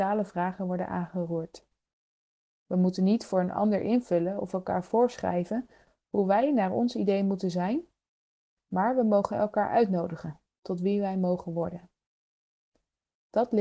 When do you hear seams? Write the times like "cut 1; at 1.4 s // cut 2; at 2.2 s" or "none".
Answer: none